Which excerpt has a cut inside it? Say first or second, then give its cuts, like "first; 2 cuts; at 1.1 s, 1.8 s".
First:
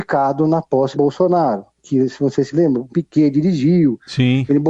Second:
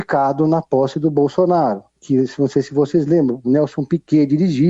first; 3 cuts; at 0.9 s, 2.5 s, 2.9 s